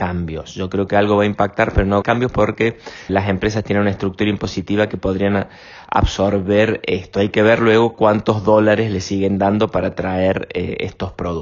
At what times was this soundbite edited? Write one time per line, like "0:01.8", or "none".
0:02.0
0:03.1